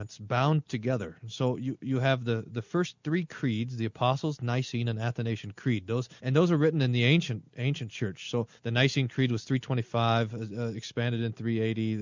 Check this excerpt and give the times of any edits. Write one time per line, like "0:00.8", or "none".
0:06.2
0:08.6